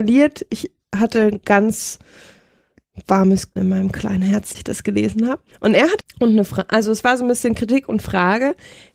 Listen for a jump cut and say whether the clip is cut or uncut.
cut